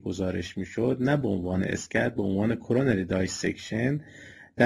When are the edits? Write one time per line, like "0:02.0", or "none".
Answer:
none